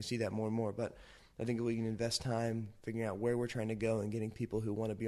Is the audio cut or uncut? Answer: uncut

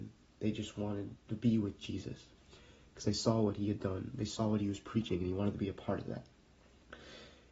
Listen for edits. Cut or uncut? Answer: cut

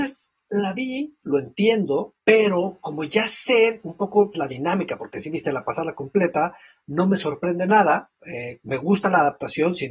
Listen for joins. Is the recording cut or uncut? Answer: cut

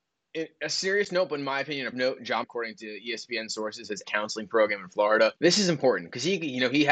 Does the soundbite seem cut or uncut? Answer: cut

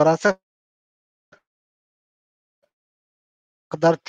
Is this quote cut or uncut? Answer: uncut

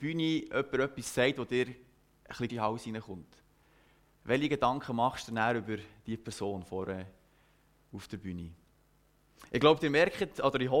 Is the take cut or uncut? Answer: cut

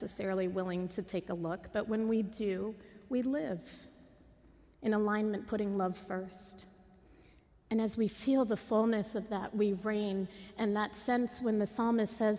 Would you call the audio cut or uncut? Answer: uncut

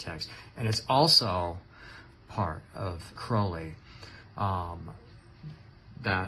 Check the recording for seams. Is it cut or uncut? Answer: cut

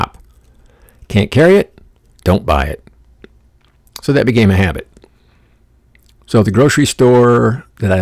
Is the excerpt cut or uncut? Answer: uncut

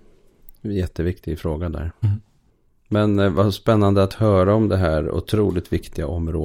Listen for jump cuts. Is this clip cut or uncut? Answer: uncut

